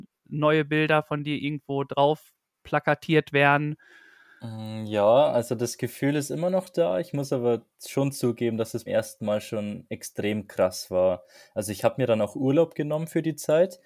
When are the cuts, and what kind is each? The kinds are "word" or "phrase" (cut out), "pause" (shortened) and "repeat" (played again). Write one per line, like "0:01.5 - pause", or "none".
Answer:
0:08.9 - word